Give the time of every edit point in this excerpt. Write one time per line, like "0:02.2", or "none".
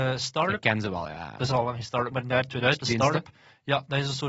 0:02.1
0:02.8

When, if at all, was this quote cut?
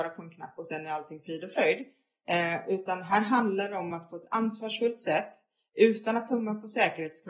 none

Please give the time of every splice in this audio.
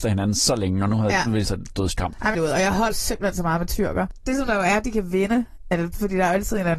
0:01.4
0:02.3
0:02.9

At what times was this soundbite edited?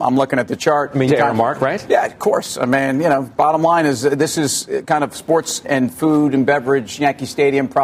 0:01.1
0:05.6

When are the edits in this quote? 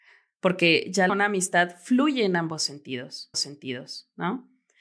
0:01.1
0:03.3

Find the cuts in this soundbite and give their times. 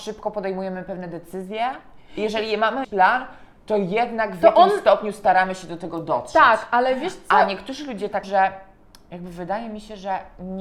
0:02.8
0:08.2

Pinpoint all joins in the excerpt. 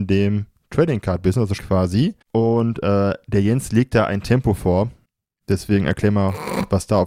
0:01.6
0:02.2

